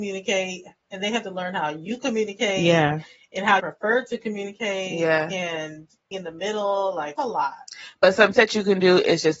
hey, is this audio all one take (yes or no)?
no